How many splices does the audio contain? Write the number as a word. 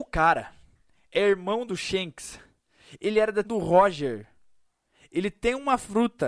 one